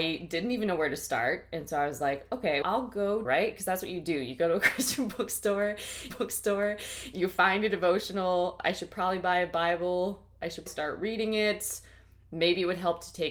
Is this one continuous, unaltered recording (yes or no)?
no